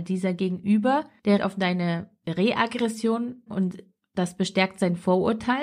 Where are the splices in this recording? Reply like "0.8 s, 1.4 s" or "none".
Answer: 1.4 s, 3.5 s